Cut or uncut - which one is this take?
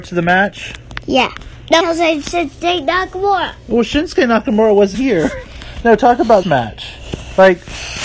cut